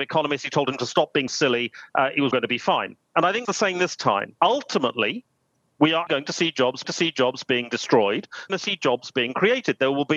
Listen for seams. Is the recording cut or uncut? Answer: cut